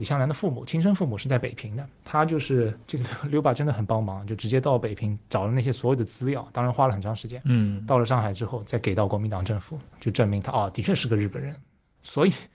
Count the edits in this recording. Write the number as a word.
three